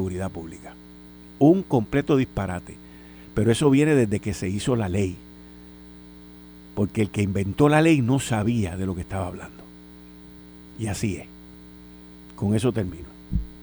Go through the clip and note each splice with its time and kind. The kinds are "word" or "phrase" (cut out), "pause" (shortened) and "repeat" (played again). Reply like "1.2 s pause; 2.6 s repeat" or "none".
none